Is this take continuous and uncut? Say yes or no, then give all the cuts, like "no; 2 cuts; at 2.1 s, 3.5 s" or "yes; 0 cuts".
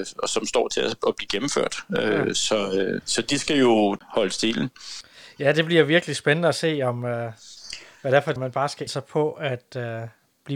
no; 3 cuts; at 3.0 s, 8.4 s, 8.9 s